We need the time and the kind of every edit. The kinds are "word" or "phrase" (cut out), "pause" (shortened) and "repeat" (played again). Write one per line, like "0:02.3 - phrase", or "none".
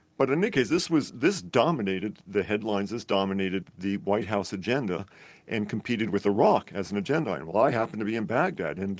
none